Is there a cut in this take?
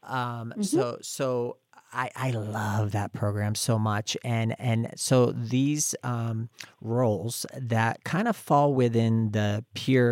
no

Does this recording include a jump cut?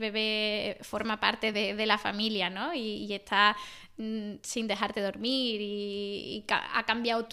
no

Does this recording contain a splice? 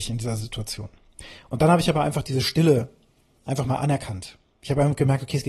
no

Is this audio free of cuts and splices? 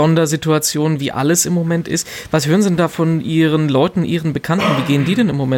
yes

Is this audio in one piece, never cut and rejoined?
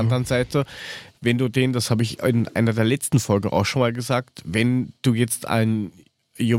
yes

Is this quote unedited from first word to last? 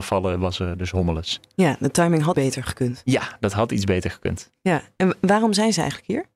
no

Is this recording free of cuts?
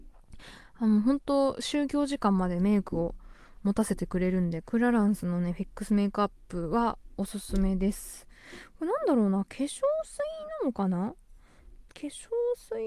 no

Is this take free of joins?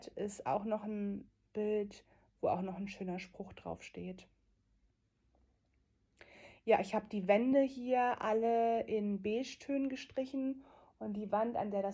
yes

